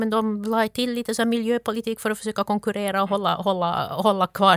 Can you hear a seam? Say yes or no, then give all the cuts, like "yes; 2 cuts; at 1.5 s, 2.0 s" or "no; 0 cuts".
no; 0 cuts